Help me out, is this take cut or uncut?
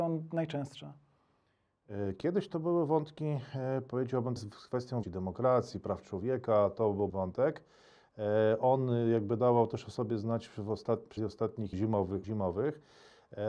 cut